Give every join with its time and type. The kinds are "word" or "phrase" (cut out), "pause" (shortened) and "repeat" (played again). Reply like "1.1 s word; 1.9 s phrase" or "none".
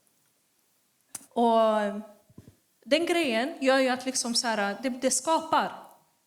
1.2 s pause

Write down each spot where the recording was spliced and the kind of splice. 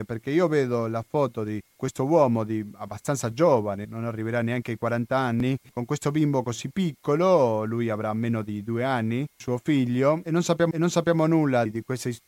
1.7 s pause; 3.8 s word; 10.7 s repeat

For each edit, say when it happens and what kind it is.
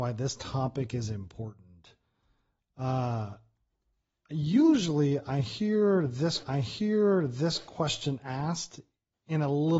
6.4 s repeat

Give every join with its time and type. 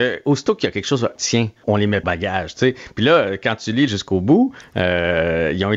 1.2 s phrase; 1.6 s word; 2.0 s phrase; 3.9 s word

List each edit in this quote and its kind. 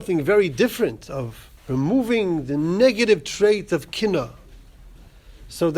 1.6 s pause

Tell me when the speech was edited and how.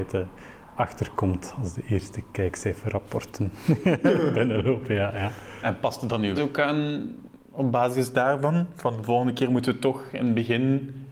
6.4 s word; 7.4 s pause

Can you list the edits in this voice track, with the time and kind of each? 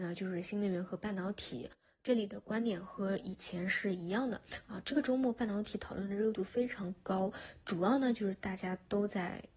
none

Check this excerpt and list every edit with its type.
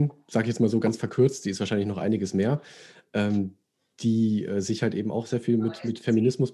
none

